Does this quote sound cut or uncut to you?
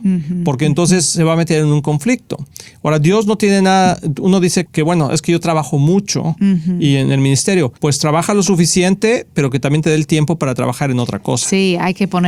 cut